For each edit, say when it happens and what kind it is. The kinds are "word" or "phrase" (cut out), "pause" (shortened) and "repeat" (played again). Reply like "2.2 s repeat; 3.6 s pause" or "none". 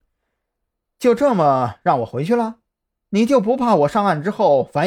none